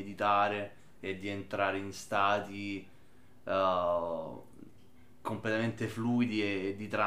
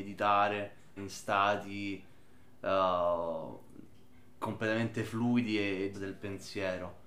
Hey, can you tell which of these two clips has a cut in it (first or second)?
second